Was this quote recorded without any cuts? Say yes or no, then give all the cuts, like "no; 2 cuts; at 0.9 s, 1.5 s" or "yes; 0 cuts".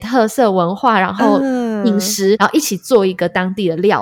no; 1 cut; at 2.4 s